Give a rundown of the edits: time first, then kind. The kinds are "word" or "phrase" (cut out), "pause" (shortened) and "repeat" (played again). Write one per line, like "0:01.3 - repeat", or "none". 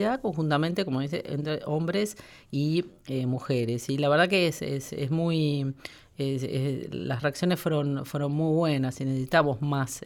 none